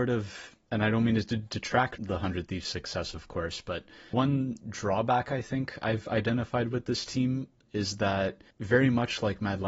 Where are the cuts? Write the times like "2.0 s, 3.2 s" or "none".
2.0 s, 4.1 s, 8.5 s